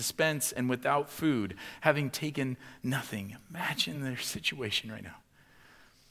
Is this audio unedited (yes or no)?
yes